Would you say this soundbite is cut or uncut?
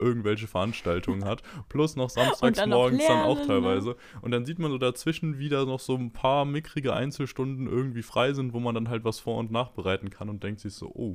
uncut